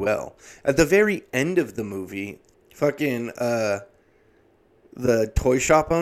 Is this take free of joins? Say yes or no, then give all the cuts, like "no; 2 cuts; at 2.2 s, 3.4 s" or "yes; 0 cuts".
no; 1 cut; at 2.5 s